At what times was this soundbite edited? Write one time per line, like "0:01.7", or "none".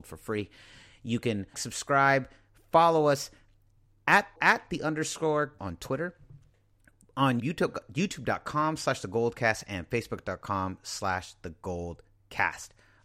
0:01.5
0:04.4
0:05.6
0:07.4